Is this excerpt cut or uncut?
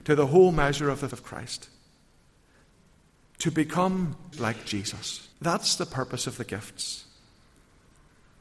cut